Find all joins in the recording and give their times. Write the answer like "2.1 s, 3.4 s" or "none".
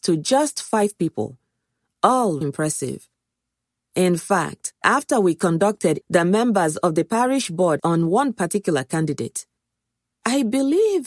2.4 s, 4.8 s, 6.0 s, 7.8 s